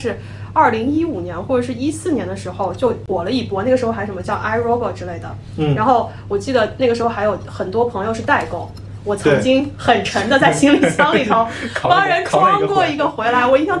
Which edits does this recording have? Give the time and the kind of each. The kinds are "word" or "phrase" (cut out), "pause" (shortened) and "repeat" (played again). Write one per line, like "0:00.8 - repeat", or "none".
none